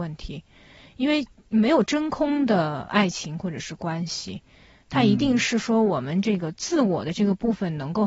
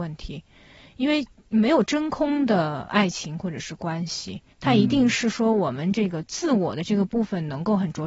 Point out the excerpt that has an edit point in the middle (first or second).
second